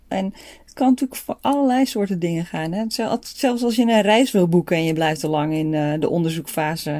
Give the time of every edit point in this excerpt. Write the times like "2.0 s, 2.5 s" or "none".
none